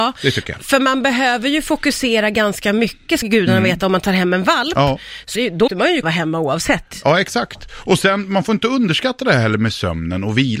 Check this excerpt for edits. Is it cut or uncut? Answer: cut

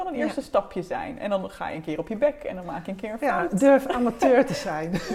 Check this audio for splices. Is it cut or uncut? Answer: uncut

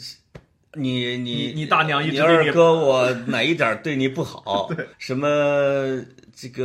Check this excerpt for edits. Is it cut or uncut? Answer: cut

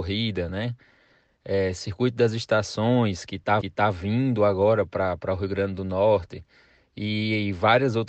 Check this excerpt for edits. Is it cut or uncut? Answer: cut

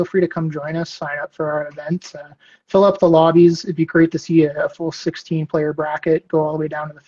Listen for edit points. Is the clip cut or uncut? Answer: uncut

